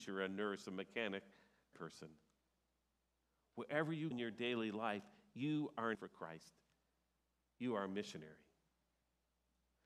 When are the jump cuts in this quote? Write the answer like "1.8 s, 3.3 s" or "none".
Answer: 1.7 s, 4.1 s, 5.9 s